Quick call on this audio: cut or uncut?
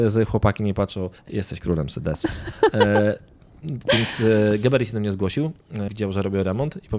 cut